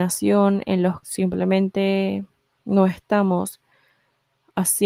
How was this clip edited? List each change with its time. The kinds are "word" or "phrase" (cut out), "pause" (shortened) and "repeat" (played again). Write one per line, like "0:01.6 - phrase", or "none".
0:01.0 - word